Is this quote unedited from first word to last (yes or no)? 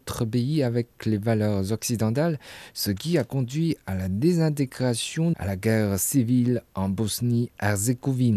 no